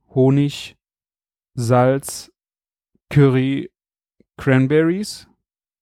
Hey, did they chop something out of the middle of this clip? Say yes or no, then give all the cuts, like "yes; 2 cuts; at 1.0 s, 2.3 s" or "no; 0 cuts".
no; 0 cuts